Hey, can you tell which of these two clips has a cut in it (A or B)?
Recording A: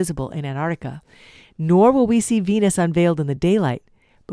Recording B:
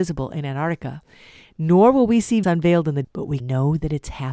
B